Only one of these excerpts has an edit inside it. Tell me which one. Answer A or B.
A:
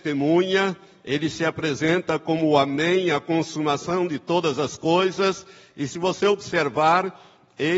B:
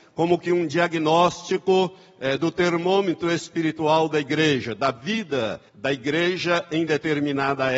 B